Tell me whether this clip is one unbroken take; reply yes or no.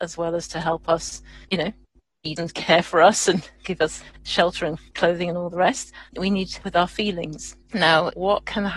no